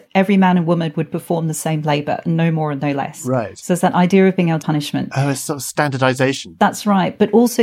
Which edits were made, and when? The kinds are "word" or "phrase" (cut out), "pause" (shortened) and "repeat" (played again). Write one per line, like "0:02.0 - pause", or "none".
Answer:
0:04.6 - phrase